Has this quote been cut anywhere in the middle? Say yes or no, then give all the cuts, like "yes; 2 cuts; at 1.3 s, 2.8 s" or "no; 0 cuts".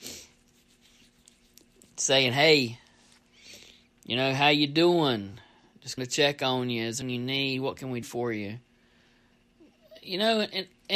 yes; 3 cuts; at 6.0 s, 7.0 s, 8.0 s